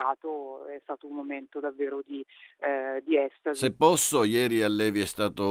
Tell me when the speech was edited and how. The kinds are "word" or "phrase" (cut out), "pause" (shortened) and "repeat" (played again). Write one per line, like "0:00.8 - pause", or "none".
none